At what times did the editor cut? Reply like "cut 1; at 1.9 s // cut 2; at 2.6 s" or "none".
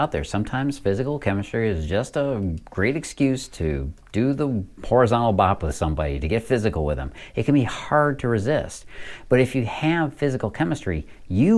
none